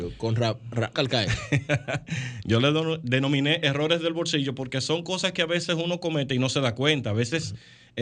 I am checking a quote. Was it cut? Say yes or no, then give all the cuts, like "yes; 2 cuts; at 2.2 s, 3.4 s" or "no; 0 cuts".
yes; 1 cut; at 0.9 s